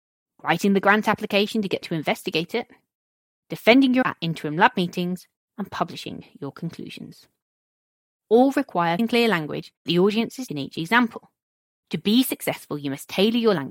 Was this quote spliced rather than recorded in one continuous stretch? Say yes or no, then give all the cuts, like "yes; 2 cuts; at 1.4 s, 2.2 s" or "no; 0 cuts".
yes; 5 cuts; at 1.8 s, 4.0 s, 9.0 s, 9.9 s, 10.5 s